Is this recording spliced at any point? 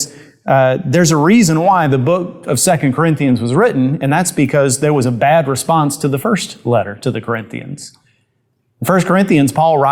no; 0 cuts

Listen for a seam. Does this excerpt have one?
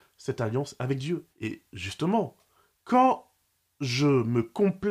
yes; 1 cut; at 1.3 s

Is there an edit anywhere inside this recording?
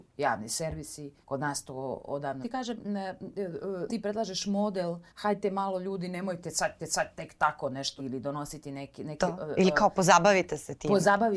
yes; 7 cuts; at 1.2 s, 2.4 s, 2.8 s, 3.9 s, 5.1 s, 6.8 s, 8.0 s

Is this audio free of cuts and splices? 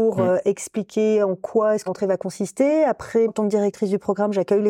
no; 2 cuts; at 1.9 s, 3.3 s

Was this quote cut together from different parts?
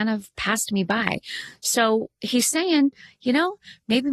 no; 0 cuts

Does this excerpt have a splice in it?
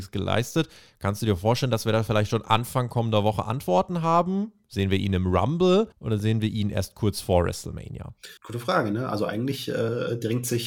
yes; 2 cuts; at 5.9 s, 8.4 s

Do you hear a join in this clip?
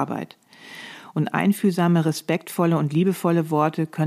no; 0 cuts

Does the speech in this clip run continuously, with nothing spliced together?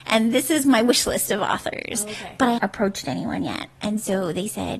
no; 1 cut; at 2.6 s

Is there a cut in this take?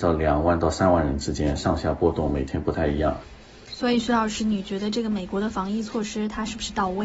no; 0 cuts

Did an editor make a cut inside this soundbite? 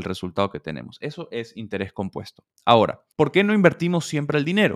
no; 0 cuts

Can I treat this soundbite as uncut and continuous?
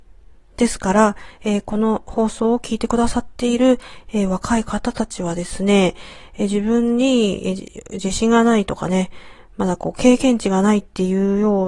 yes; 0 cuts

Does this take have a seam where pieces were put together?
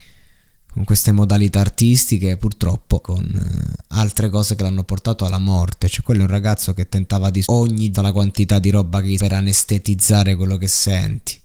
yes; 4 cuts; at 3.0 s, 7.4 s, 7.9 s, 9.2 s

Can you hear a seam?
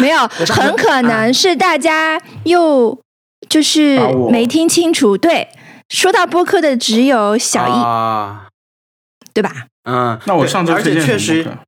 no; 0 cuts

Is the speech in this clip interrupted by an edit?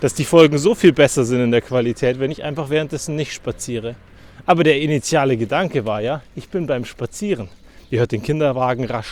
no; 0 cuts

